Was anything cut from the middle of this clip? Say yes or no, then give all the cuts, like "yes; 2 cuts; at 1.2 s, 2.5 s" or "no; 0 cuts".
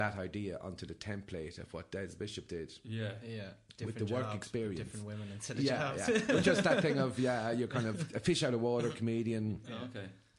no; 0 cuts